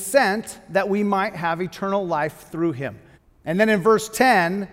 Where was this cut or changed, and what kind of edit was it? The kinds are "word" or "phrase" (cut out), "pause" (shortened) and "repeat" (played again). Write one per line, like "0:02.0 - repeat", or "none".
0:03.1 - pause